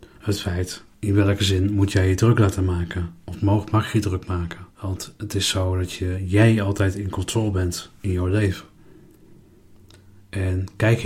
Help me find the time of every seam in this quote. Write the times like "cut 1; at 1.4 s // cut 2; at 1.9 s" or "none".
cut 1; at 0.9 s // cut 2; at 4.7 s